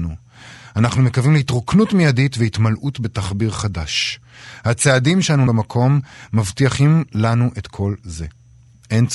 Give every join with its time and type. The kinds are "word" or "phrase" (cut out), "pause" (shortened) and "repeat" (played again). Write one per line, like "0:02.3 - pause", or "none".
0:05.5 - word